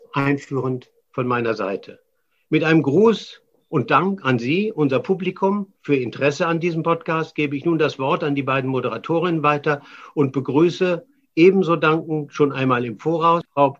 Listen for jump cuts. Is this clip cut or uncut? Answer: uncut